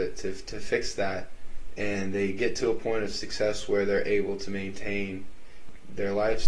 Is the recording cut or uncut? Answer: uncut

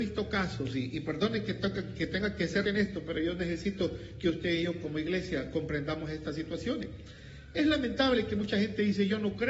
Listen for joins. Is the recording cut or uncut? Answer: cut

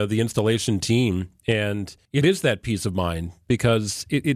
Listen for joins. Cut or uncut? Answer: cut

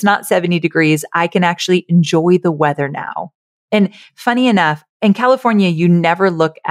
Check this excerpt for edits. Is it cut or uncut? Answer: uncut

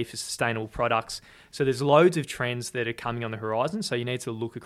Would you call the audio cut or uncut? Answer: uncut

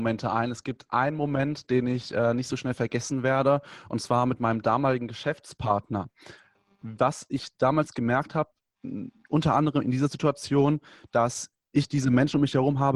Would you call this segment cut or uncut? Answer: uncut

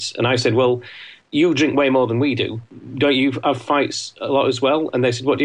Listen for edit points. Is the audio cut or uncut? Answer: uncut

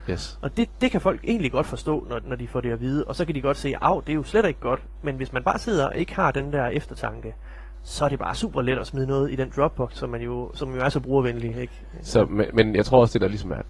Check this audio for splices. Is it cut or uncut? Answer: cut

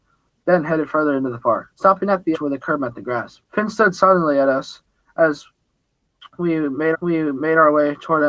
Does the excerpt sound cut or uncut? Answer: cut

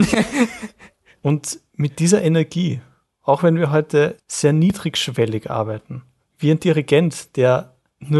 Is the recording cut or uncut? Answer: uncut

